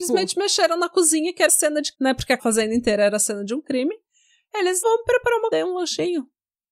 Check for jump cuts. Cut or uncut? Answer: cut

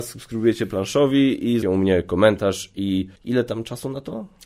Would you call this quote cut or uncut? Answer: cut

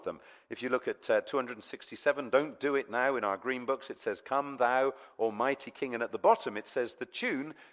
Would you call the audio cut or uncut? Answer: uncut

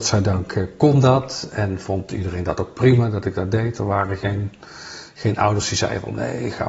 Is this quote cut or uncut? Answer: uncut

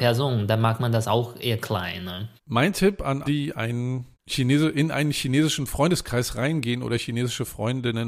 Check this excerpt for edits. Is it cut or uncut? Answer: cut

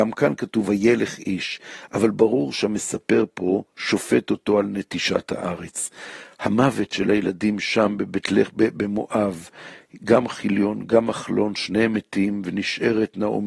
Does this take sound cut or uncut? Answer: uncut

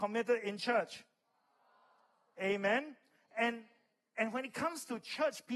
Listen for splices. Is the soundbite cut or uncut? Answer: uncut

